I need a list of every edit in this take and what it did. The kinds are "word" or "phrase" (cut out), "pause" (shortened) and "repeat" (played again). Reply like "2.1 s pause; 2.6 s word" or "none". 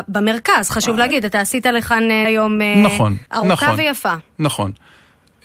2.2 s word; 3.3 s pause